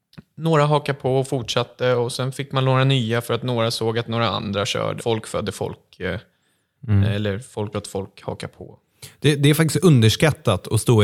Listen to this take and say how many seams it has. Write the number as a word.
two